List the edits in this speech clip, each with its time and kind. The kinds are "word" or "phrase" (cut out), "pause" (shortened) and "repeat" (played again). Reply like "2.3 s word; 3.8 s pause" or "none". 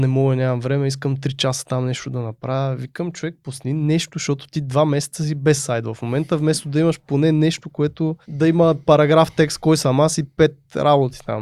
8.2 s pause